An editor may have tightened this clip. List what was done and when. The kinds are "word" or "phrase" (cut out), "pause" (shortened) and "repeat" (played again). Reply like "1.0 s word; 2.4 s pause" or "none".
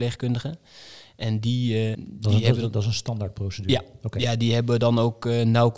1.9 s word